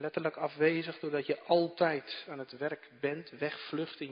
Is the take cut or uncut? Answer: uncut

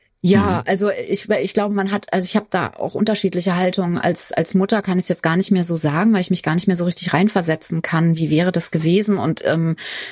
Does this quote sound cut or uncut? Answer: uncut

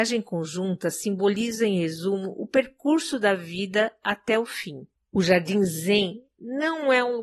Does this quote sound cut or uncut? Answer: cut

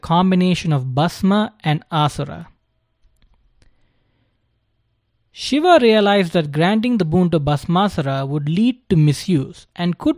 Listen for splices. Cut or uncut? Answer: uncut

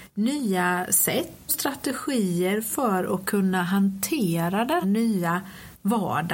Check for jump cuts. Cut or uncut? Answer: cut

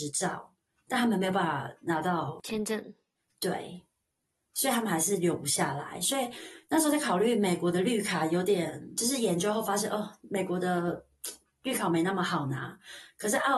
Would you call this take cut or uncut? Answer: uncut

